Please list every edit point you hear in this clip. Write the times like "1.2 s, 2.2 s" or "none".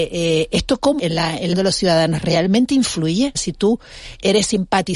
1.0 s, 1.5 s, 3.3 s